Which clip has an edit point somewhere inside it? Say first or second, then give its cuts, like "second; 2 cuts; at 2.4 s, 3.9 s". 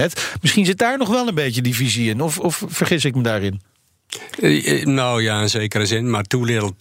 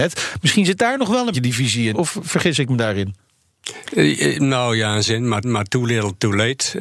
second; 4 cuts; at 1.3 s, 1.9 s, 5.1 s, 5.4 s